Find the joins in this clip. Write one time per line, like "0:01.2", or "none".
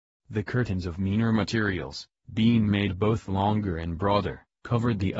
none